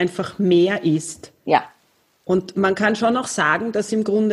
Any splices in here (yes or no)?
no